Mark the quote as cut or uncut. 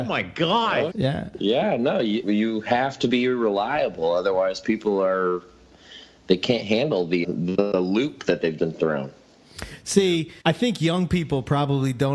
cut